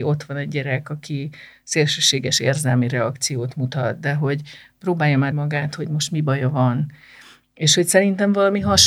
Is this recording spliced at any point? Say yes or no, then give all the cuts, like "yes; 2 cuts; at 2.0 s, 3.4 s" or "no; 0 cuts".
yes; 1 cut; at 5.3 s